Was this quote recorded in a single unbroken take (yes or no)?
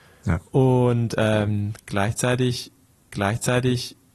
no